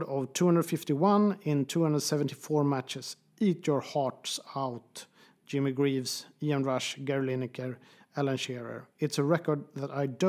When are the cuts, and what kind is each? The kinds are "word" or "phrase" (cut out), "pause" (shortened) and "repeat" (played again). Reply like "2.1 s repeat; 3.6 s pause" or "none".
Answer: none